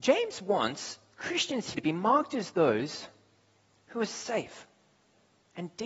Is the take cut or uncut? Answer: cut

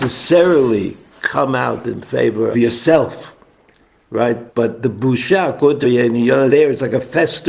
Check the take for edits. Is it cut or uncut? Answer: cut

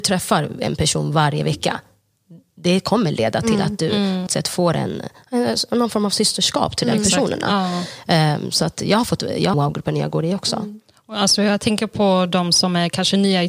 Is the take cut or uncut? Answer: cut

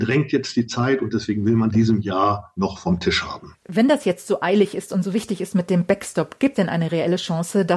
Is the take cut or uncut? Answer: cut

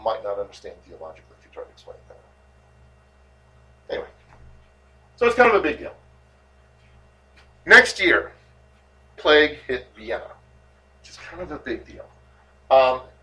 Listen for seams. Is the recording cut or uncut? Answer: cut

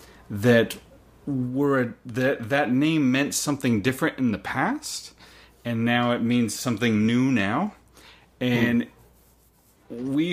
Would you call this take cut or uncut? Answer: uncut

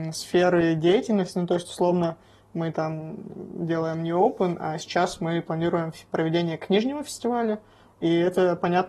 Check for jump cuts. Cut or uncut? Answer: uncut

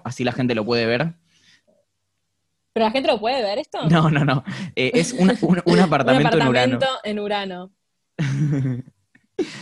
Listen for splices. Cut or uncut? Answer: uncut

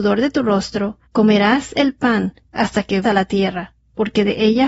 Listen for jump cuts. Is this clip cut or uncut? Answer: cut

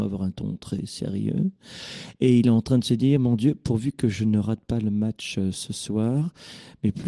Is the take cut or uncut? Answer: uncut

